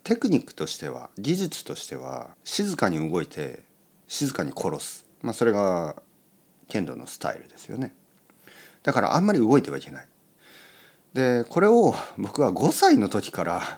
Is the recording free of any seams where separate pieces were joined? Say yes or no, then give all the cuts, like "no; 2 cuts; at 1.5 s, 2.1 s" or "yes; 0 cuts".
no; 2 cuts; at 2.3 s, 5.1 s